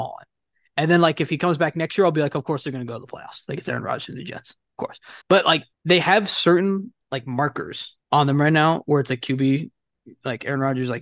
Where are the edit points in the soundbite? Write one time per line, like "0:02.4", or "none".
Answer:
0:05.2
0:05.7
0:08.0